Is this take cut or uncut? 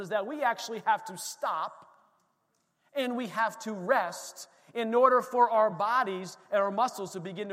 uncut